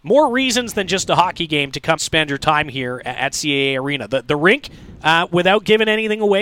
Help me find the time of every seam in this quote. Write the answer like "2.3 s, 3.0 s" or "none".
2.0 s